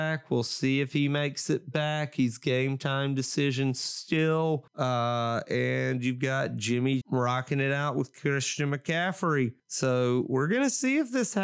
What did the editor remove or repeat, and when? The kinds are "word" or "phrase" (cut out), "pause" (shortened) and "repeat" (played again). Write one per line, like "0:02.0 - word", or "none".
0:07.0 - word